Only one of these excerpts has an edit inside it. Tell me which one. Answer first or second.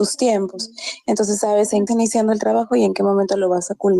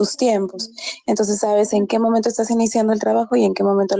first